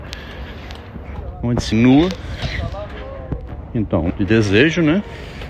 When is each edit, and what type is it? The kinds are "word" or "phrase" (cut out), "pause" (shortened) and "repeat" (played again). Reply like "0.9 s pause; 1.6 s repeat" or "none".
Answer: 1.7 s word; 4.1 s word